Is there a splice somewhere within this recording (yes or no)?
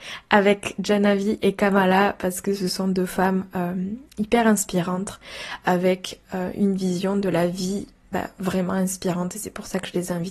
no